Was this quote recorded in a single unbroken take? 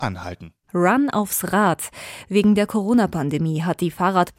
yes; 0 cuts

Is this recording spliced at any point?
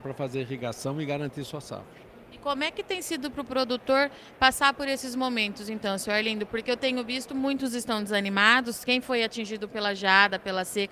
no; 0 cuts

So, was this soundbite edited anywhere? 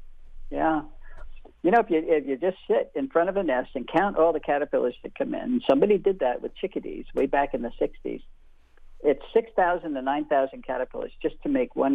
no; 0 cuts

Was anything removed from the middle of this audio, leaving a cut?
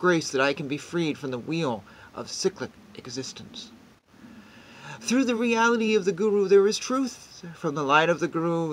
no; 0 cuts

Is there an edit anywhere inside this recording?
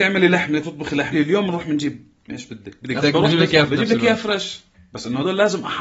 yes; 4 cuts; at 1.1 s, 2.3 s, 3.0 s, 3.7 s

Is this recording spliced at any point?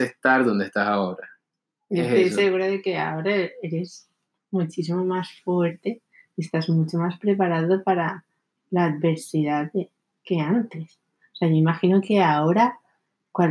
no; 0 cuts

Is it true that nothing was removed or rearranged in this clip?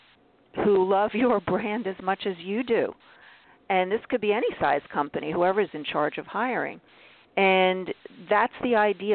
yes; 0 cuts

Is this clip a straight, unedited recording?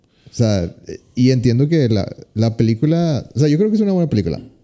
yes; 0 cuts

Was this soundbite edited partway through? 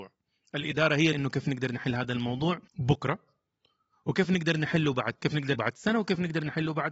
yes; 4 cuts; at 1.1 s, 2.7 s, 5.2 s, 5.5 s

